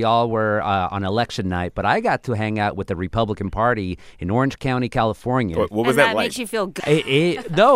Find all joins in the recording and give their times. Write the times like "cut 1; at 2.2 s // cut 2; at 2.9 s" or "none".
cut 1; at 6.8 s